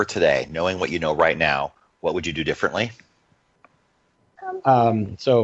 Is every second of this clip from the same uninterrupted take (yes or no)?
yes